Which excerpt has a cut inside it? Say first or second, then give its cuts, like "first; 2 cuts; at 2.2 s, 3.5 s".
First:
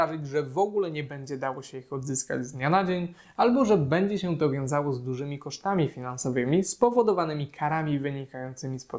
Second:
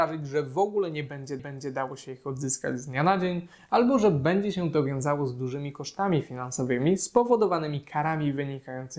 second; 1 cut; at 1.4 s